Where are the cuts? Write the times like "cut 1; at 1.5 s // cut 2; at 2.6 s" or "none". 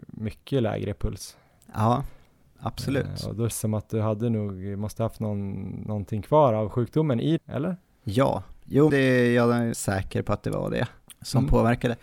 cut 1; at 3.5 s // cut 2; at 7.4 s // cut 3; at 8.9 s // cut 4; at 9.7 s